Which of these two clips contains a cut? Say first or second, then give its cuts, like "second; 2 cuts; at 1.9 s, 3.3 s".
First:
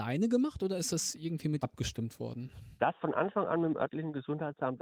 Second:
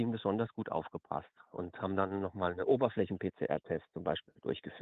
first; 2 cuts; at 1.6 s, 3.0 s